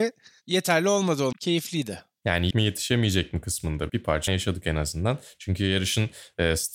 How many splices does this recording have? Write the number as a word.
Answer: four